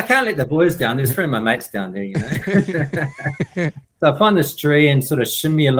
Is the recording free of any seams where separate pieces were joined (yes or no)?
yes